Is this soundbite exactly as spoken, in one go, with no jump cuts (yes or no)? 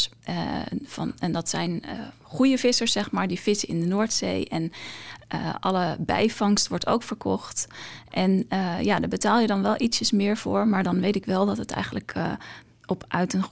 yes